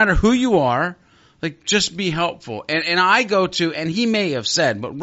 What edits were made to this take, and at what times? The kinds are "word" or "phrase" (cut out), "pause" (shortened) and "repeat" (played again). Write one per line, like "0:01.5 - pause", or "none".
none

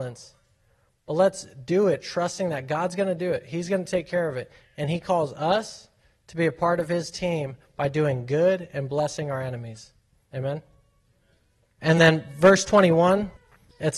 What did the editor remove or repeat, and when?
none

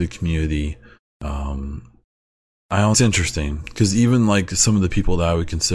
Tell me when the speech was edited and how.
0:02.3 - pause
0:02.9 - phrase

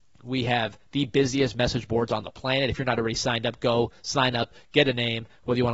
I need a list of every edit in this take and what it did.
none

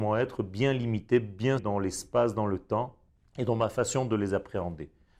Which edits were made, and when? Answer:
0:01.6 - word
0:03.1 - pause

